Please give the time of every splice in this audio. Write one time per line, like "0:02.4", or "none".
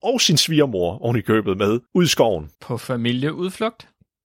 0:01.9
0:02.5